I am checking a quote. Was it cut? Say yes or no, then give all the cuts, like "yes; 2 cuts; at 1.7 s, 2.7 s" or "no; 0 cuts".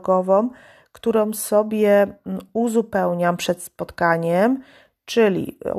no; 0 cuts